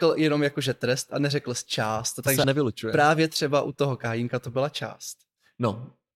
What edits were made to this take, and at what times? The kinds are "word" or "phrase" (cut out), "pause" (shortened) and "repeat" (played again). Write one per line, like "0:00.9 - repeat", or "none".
0:02.4 - word

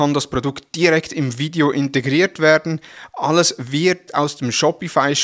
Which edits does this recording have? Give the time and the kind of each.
0:04.1 - word

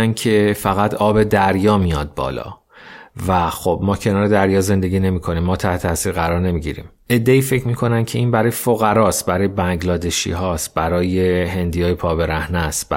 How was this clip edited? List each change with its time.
none

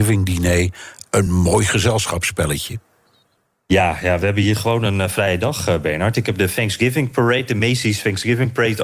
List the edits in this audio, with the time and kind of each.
none

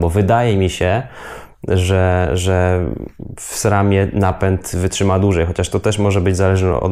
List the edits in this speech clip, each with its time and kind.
none

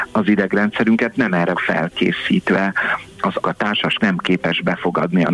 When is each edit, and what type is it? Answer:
0:01.5 - word
0:03.4 - word
0:04.0 - word

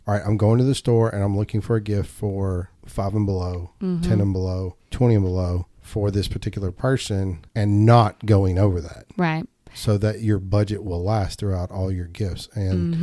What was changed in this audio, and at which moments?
0:02.7 - pause
0:07.5 - pause

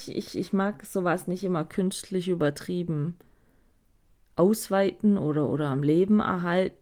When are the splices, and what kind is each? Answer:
none

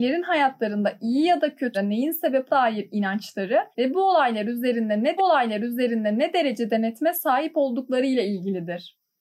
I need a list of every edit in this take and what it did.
0:01.7 - word
0:02.5 - word
0:03.7 - pause
0:05.2 - repeat

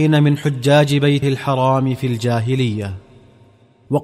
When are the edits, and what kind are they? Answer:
0:01.2 - word

